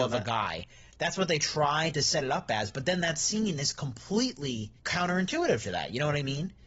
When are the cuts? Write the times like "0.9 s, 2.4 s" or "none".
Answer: 4.8 s